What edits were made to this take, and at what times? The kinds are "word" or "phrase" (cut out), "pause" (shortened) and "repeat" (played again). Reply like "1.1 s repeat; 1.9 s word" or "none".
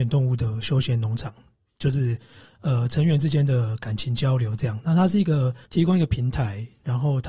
5.7 s pause